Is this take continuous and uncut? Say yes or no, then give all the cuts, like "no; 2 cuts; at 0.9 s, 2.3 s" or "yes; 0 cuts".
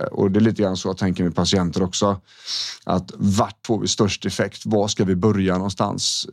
no; 1 cut; at 3.6 s